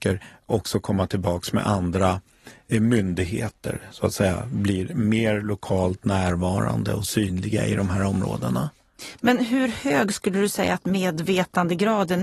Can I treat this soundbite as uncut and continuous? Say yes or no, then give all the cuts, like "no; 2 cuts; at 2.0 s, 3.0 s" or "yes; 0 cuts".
yes; 0 cuts